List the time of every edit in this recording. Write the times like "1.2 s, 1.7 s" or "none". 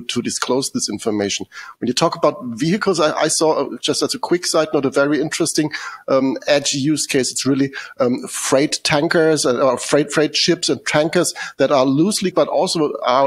12.3 s